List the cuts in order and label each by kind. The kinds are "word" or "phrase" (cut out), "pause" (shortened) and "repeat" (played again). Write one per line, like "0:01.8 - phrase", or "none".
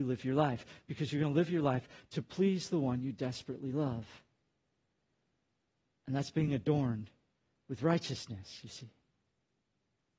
none

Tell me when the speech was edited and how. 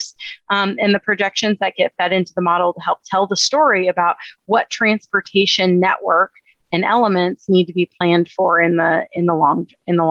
none

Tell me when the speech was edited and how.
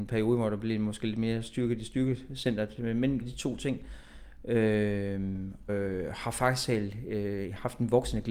0:03.2 - word
0:05.7 - word

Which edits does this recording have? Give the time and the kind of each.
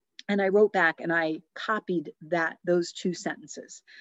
0:01.5 - pause

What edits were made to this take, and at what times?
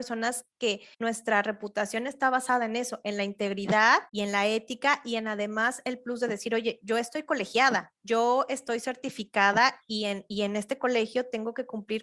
0:00.9 - pause
0:04.1 - pause
0:08.0 - pause

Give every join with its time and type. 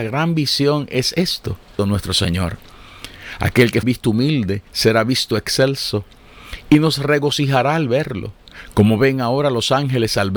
0:01.8 - word
0:03.8 - word

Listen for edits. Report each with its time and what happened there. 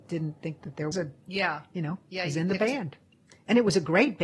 0:00.9 - word

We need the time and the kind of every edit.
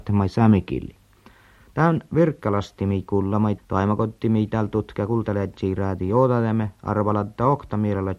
0:03.6 - word

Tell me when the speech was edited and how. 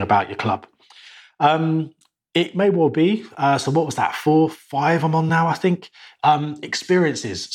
none

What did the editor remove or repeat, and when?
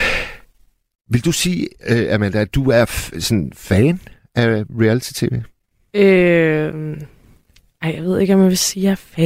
none

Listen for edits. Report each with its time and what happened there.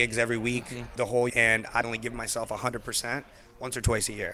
0:01.0 - word
0:01.3 - word
0:01.8 - word

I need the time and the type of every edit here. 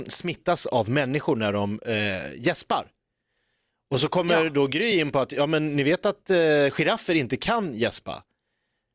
none

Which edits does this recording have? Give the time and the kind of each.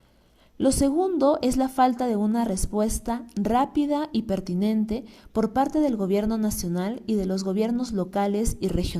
none

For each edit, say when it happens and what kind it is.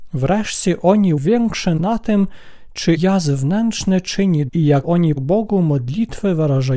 0:01.2 - word
0:01.8 - word
0:03.0 - word
0:04.5 - word
0:04.8 - word
0:05.2 - word

